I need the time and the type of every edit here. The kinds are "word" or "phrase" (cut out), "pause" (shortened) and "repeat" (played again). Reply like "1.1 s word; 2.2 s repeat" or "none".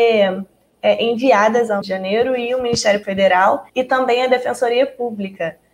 1.8 s phrase; 3.0 s word; 3.7 s pause